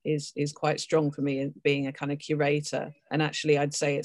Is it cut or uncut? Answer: cut